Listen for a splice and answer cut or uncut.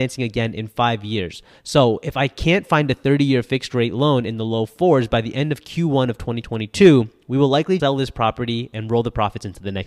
cut